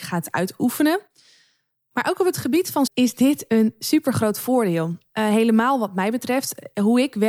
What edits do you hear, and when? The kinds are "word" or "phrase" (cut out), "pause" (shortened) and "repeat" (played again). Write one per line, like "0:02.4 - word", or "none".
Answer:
0:02.9 - word